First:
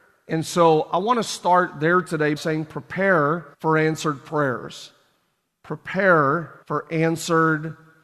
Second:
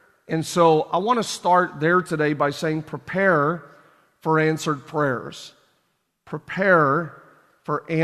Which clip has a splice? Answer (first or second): first